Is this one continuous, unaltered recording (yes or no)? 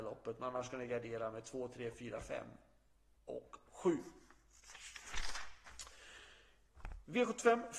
yes